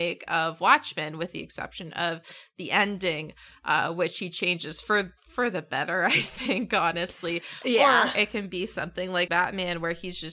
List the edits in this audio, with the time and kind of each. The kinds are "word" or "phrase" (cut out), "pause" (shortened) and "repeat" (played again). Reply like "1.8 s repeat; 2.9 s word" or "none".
9.3 s word